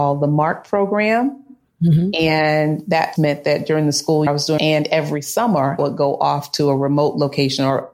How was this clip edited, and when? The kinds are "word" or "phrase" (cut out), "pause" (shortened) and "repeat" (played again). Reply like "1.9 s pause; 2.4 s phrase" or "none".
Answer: 3.2 s word; 4.3 s word; 4.6 s word; 5.8 s word